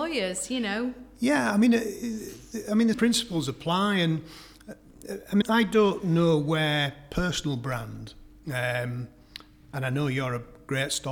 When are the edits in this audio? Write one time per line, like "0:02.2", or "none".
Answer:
0:02.9
0:05.4